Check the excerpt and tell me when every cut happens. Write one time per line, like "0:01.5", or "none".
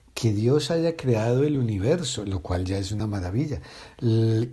none